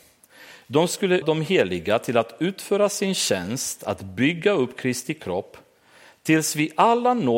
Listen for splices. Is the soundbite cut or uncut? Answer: cut